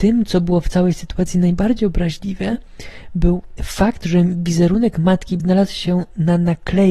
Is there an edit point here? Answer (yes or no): yes